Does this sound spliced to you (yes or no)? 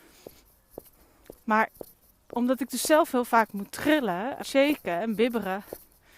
yes